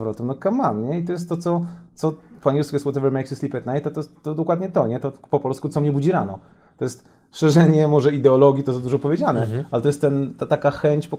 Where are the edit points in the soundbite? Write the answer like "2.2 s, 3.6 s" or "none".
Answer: 1.9 s